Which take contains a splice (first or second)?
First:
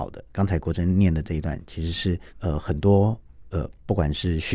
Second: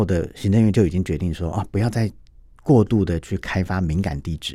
first